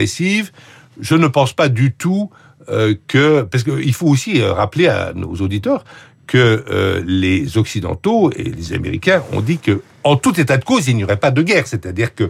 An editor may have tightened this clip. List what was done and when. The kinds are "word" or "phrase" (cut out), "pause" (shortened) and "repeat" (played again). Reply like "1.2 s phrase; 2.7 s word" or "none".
none